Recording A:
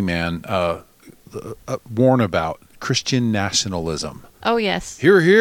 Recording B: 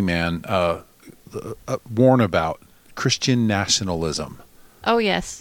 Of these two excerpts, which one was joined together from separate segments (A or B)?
A